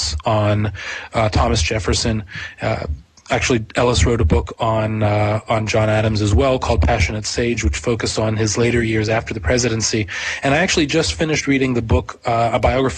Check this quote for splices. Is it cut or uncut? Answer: uncut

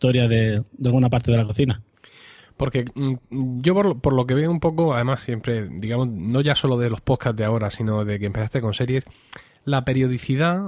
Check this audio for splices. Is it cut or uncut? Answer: uncut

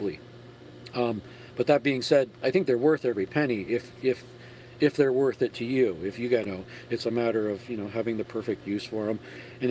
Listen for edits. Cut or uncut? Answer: cut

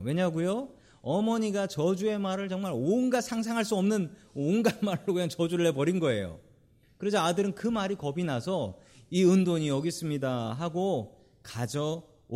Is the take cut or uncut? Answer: uncut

